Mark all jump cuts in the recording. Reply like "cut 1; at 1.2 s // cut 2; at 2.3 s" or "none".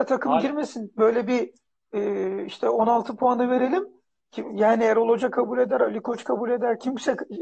none

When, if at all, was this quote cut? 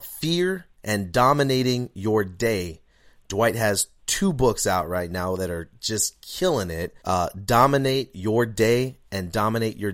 cut 1; at 7.0 s

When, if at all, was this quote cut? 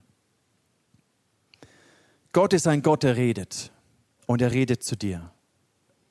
none

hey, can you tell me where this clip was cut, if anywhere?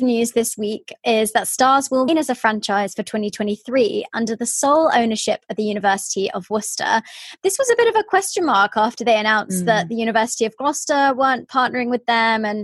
cut 1; at 2.1 s

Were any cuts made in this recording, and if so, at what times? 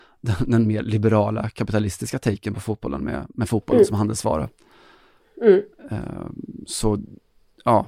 none

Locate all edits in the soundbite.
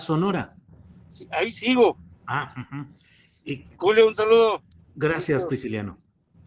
none

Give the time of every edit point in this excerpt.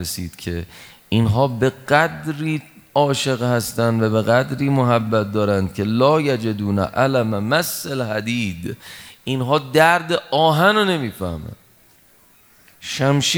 none

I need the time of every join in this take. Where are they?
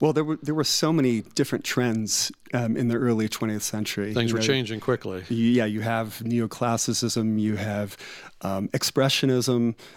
none

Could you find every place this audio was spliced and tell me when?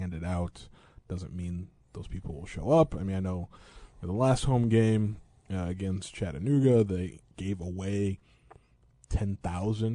cut 1; at 7.3 s

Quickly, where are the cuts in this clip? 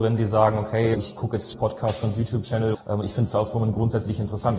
cut 1; at 0.9 s // cut 2; at 1.5 s // cut 3; at 2.7 s

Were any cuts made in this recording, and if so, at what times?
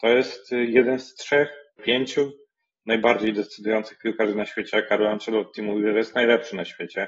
cut 1; at 1.8 s

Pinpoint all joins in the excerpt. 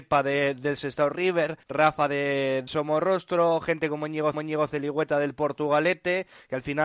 cut 1; at 1.6 s // cut 2; at 2.7 s // cut 3; at 4.3 s

